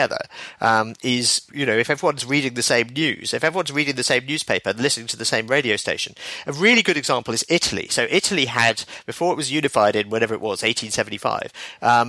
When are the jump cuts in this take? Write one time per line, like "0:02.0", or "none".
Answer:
0:01.5